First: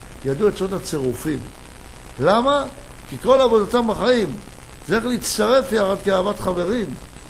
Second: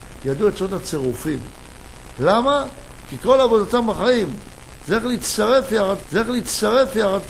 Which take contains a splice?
second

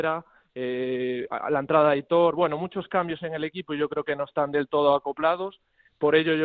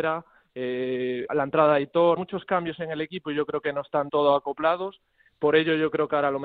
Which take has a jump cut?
second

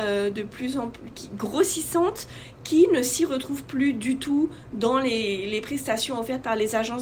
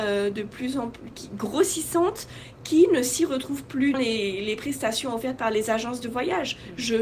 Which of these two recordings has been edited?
second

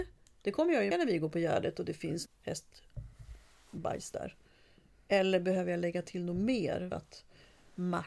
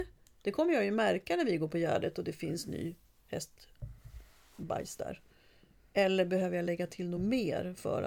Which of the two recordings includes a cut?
first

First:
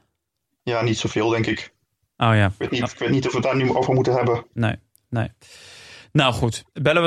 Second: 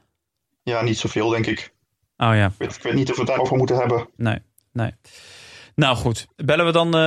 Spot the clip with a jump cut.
second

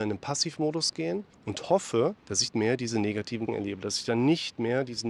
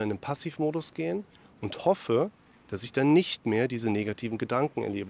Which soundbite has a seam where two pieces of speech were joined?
first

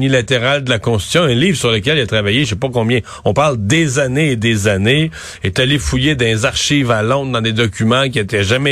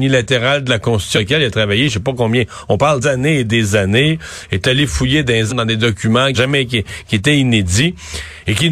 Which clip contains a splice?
second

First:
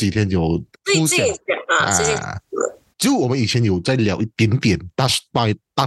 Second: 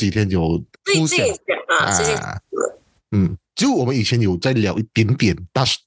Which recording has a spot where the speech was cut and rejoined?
first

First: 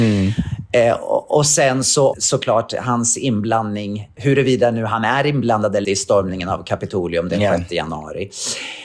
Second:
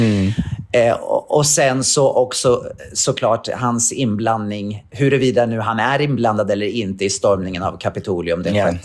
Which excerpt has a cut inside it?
first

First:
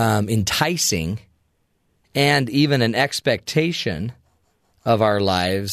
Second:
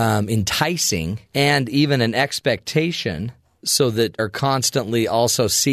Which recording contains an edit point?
second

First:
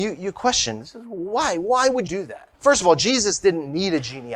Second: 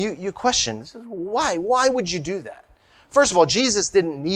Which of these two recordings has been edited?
first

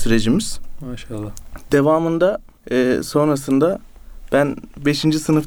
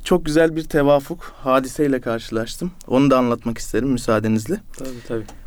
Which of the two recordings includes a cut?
first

